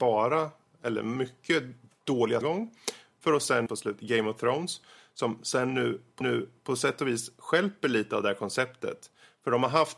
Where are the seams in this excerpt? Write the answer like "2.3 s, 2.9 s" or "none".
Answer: 2.4 s, 3.7 s, 6.2 s